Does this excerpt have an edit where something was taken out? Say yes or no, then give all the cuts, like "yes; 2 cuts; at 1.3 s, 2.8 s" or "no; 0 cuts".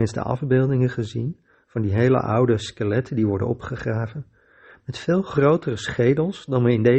no; 0 cuts